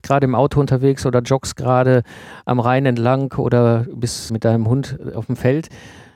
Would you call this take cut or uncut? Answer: cut